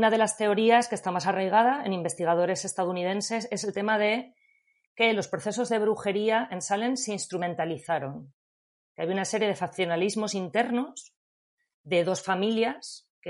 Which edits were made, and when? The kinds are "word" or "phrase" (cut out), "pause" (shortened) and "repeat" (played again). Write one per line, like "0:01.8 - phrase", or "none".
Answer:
none